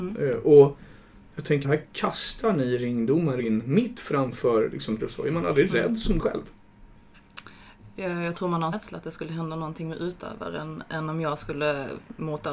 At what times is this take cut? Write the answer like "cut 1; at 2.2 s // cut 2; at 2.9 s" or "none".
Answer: cut 1; at 1.6 s // cut 2; at 3.4 s // cut 3; at 5.0 s // cut 4; at 6.2 s // cut 5; at 8.7 s